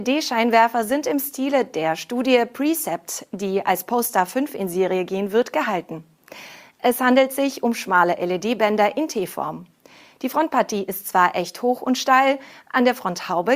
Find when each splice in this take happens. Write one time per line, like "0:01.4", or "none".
none